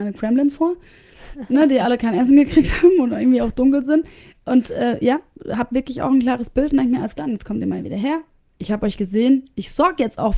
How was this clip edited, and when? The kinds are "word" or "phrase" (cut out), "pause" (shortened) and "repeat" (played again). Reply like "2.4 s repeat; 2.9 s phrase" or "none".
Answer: none